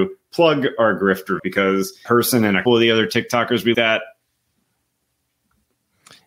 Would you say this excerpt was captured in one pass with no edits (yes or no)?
no